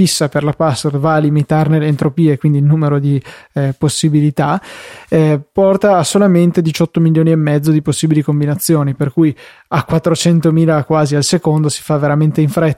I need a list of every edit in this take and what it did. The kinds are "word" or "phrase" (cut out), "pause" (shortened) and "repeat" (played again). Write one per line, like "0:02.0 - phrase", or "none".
none